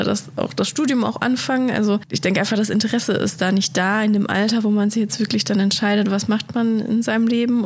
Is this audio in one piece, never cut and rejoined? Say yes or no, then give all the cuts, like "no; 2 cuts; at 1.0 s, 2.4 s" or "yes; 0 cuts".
yes; 0 cuts